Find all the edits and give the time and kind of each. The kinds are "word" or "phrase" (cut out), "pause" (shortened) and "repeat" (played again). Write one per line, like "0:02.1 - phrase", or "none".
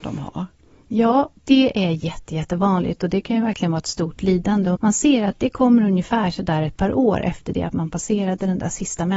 0:01.4 - pause
0:04.8 - word

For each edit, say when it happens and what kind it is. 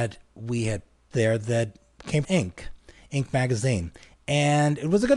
0:01.1 - word
0:02.2 - word

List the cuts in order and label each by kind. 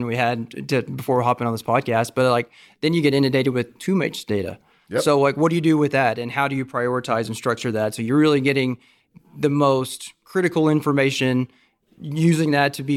none

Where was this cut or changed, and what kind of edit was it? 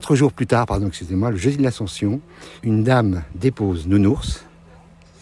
0:02.6 - pause

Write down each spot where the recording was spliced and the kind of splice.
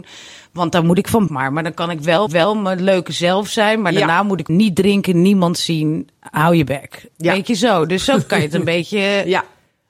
0:01.3 - phrase
0:02.3 - repeat
0:04.5 - phrase

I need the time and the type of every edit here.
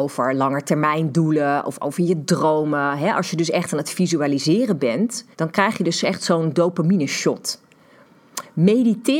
0:05.3 - pause

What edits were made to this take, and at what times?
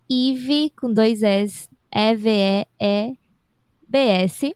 none

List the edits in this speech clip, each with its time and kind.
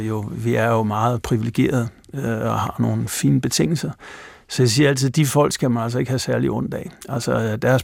none

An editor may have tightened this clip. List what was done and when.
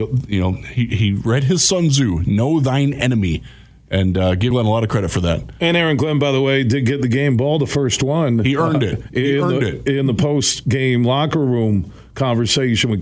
0:04.5 - word

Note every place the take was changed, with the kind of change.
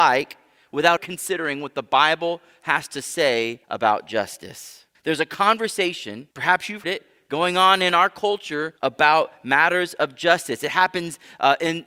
0:01.0 - word
0:03.6 - pause
0:04.9 - pause
0:06.3 - pause
0:06.8 - word
0:08.8 - pause

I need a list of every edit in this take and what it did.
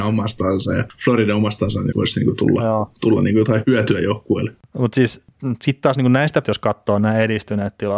0:01.9 - word
0:06.4 - word

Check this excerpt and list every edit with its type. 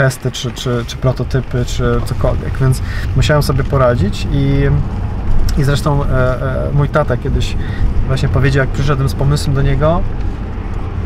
none

